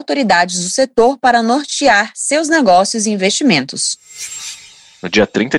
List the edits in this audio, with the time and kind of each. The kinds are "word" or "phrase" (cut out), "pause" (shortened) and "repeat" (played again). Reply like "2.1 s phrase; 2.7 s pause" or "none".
none